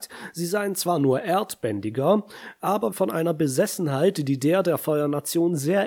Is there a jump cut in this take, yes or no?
yes